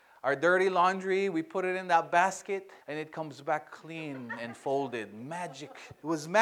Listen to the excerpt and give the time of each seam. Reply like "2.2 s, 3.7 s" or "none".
2.8 s